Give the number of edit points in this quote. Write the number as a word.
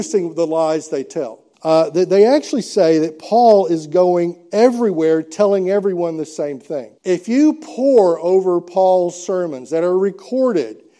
two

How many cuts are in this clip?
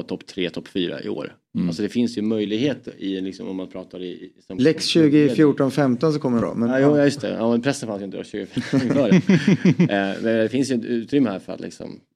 one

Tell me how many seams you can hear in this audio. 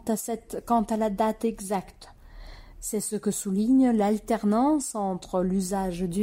zero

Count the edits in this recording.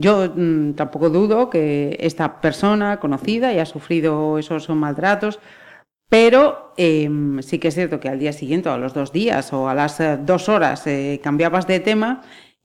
zero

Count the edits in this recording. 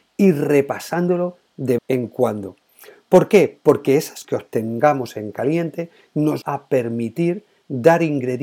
three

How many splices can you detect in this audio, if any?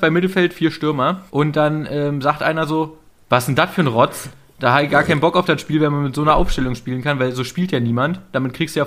one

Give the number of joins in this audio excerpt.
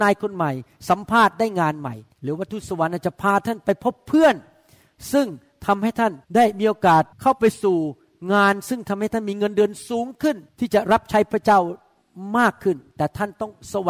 four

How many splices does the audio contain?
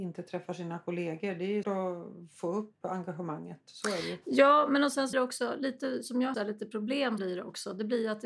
four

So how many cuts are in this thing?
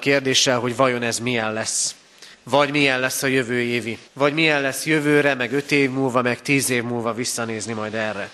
two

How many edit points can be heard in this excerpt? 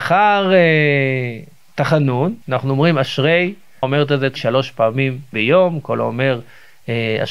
four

